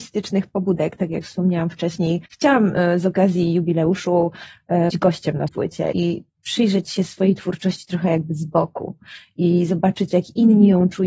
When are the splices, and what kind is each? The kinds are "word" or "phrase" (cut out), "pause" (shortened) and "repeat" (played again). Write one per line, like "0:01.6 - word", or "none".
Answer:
0:02.3 - pause
0:04.9 - word
0:05.5 - word
0:05.9 - word